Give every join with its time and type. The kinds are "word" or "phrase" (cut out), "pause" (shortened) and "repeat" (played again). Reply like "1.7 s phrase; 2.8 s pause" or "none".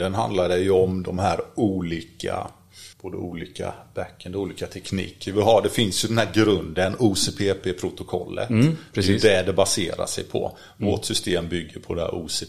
2.9 s pause